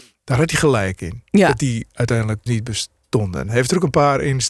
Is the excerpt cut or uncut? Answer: cut